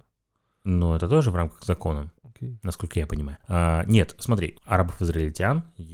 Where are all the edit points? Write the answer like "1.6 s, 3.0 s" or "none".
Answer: 2.2 s, 3.4 s